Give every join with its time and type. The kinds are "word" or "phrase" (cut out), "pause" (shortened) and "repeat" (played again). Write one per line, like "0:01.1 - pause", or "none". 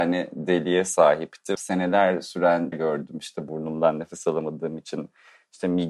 0:01.6 - word
0:02.7 - word
0:03.5 - phrase